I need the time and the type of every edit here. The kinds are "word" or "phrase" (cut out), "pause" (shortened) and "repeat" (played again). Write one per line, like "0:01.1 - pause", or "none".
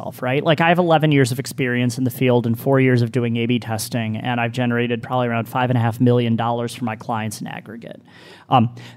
none